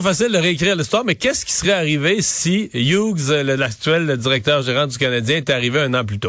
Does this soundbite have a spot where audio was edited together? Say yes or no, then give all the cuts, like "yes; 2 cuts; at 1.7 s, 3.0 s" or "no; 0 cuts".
no; 0 cuts